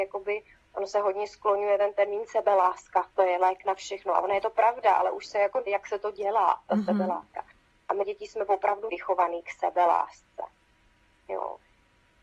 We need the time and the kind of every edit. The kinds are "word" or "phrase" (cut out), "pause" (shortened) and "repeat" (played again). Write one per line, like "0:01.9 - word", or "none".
0:03.1 - word
0:05.7 - word
0:08.0 - word
0:08.9 - word